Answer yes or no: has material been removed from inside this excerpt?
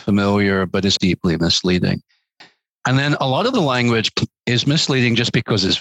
yes